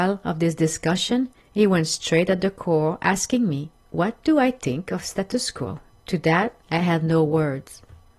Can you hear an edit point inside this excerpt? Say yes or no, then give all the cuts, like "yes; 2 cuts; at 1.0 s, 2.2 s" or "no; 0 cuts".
yes; 4 cuts; at 1.4 s, 3.7 s, 5.9 s, 6.6 s